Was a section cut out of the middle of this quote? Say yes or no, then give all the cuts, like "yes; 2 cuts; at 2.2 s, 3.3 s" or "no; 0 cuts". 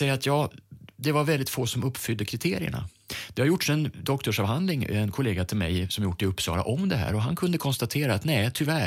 no; 0 cuts